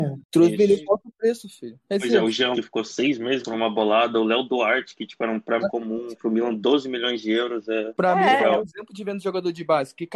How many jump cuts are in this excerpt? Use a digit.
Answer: 6